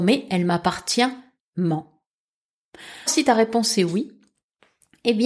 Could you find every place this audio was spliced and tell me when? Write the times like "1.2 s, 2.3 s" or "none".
1.4 s, 3.1 s

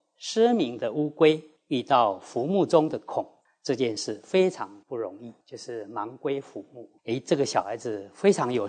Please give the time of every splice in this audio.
1.6 s, 3.4 s, 4.8 s, 5.4 s, 7.0 s

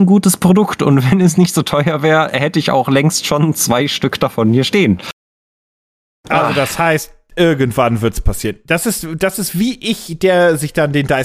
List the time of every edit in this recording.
none

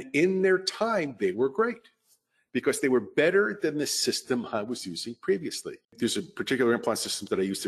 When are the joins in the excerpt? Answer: 5.8 s

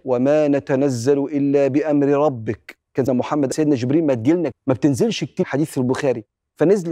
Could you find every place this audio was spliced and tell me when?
3.1 s, 3.5 s, 4.5 s, 5.4 s

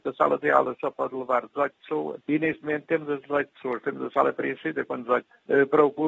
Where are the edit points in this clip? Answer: none

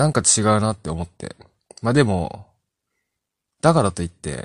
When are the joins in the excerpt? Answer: none

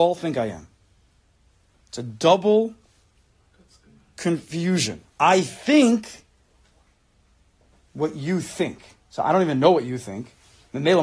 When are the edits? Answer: 5.1 s

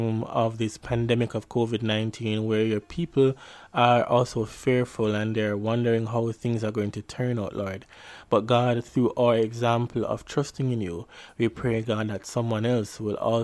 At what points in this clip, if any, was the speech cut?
none

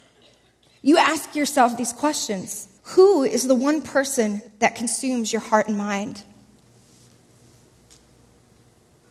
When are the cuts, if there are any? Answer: 2.8 s, 4.5 s

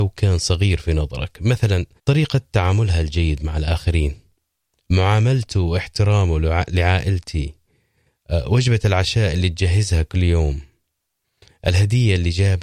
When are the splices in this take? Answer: 2.0 s

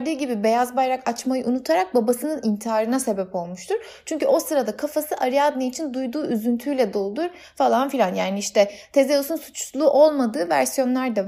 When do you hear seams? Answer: none

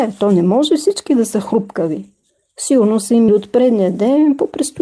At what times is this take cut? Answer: 1.1 s, 3.3 s

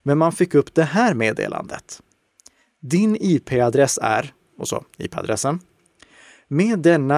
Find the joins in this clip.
none

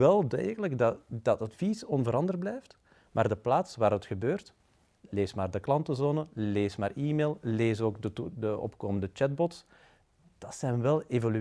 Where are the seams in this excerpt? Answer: none

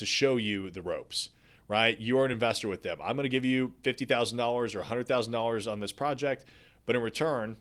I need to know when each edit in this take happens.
none

